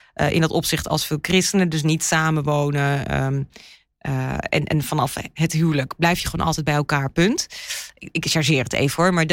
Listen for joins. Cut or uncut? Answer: uncut